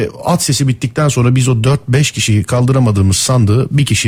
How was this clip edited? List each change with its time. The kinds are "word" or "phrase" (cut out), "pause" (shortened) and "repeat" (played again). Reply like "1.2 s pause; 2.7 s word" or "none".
none